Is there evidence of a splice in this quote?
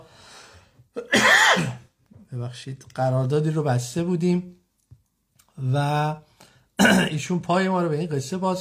no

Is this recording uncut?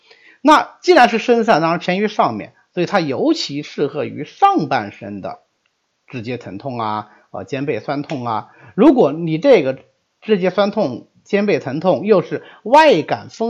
yes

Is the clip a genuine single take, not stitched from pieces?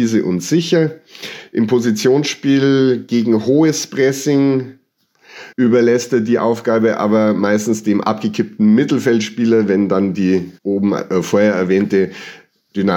no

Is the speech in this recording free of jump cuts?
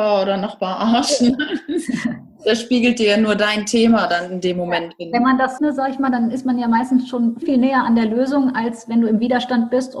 no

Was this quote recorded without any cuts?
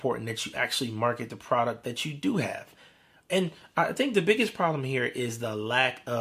yes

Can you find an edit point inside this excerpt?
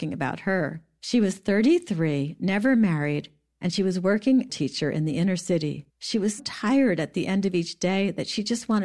yes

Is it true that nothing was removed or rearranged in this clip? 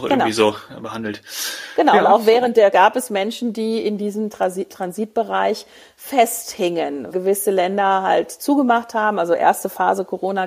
no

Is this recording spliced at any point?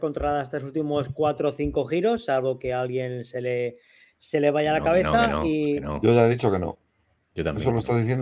no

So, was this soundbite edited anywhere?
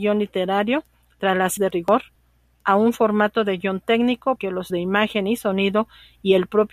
yes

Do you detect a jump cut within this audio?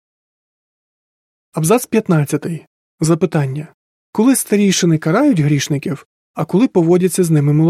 yes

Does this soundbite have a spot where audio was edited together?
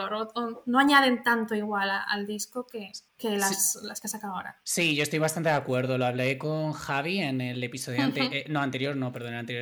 yes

